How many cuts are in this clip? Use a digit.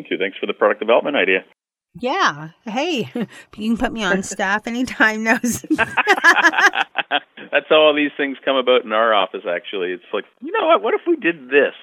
0